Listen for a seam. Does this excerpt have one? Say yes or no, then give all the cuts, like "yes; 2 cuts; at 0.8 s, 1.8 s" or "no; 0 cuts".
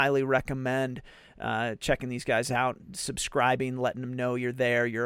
no; 0 cuts